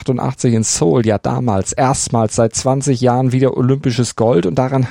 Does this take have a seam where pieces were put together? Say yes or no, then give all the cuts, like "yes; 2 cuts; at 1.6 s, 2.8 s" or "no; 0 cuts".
no; 0 cuts